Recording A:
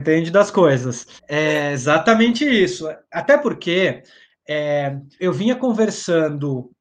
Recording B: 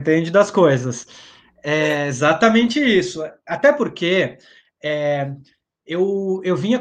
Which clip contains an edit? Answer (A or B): A